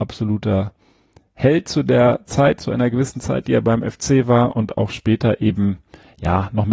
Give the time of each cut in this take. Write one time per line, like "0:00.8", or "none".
none

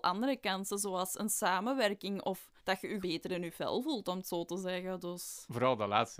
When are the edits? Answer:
0:02.6
0:03.0

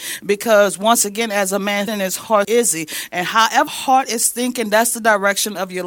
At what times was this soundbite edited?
0:01.9
0:02.4
0:03.7

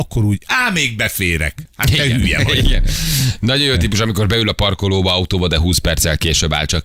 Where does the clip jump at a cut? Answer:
none

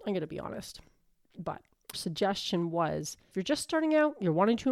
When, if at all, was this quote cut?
0:01.9
0:03.3

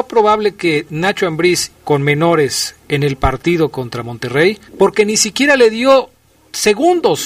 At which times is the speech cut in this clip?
0:01.7
0:04.7

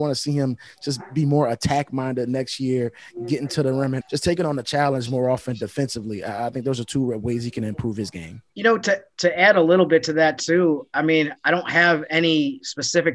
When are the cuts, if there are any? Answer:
0:04.0
0:08.5

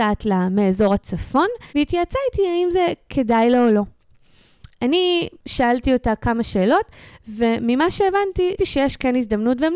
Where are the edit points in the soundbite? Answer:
0:01.7
0:08.6

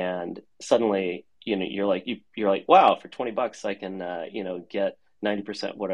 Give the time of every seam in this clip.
0:01.3

